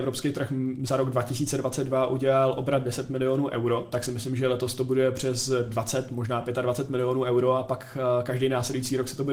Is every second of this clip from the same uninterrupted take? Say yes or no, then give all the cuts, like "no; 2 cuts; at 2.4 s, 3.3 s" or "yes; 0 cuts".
yes; 0 cuts